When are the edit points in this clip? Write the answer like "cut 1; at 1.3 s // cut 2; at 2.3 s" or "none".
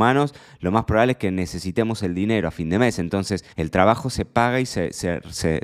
cut 1; at 3.5 s